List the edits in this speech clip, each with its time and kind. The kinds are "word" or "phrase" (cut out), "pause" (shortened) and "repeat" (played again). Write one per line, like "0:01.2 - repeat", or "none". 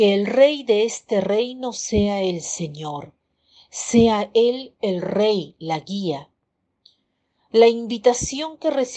none